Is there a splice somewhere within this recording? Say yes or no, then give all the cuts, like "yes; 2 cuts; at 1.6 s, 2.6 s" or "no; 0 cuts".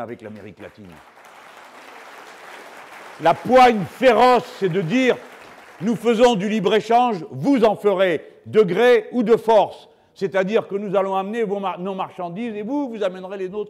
no; 0 cuts